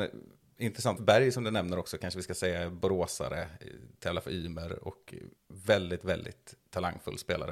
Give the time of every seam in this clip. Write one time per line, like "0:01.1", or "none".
0:01.0
0:05.4